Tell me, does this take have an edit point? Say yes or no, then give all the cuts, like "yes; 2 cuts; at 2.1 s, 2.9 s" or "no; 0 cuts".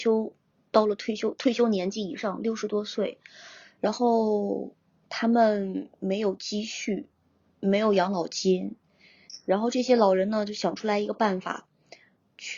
no; 0 cuts